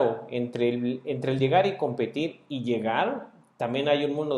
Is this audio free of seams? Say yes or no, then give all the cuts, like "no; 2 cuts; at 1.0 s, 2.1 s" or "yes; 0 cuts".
yes; 0 cuts